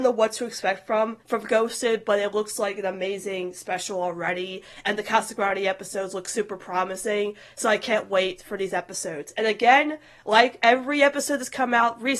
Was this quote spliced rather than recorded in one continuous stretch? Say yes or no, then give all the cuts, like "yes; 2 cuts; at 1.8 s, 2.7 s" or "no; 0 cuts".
yes; 1 cut; at 1.2 s